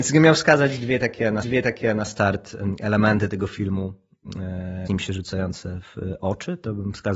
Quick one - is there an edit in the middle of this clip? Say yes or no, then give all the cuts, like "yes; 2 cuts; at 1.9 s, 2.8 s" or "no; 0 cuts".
yes; 2 cuts; at 1.4 s, 4.9 s